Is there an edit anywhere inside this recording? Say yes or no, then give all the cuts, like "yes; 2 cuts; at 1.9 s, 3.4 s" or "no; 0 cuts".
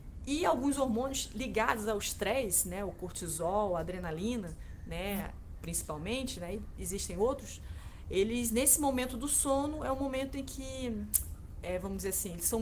no; 0 cuts